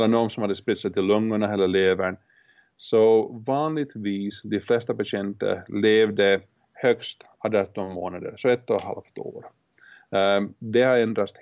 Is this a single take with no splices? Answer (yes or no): yes